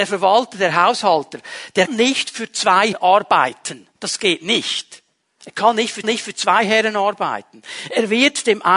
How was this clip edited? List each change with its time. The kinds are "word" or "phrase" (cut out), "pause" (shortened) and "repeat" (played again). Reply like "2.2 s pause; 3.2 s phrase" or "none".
1.9 s word; 2.9 s word; 4.0 s pause; 5.2 s pause; 6.0 s repeat